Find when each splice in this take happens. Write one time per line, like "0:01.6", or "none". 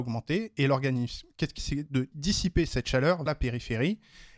0:01.6
0:02.1
0:03.3